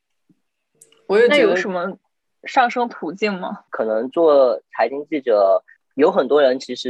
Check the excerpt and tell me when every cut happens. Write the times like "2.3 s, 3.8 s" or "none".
5.8 s